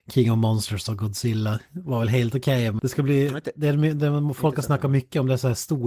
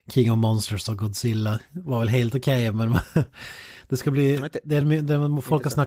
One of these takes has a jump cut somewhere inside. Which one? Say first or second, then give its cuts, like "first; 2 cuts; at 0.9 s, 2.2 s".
first; 1 cut; at 2.8 s